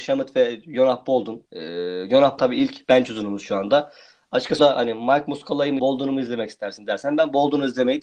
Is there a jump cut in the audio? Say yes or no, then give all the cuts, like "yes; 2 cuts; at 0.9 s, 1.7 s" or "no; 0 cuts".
yes; 4 cuts; at 1.5 s, 2.4 s, 4.6 s, 5.8 s